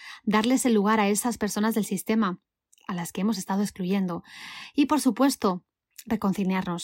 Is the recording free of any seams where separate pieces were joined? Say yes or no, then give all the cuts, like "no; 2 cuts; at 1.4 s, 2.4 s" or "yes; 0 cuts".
yes; 0 cuts